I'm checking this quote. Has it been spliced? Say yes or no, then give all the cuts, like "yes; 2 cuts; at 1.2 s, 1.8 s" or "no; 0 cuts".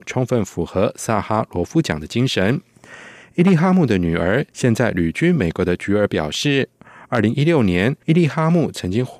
yes; 2 cuts; at 4.5 s, 8.0 s